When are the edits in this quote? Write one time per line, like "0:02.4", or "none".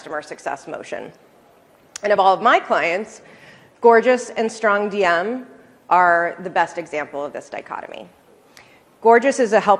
none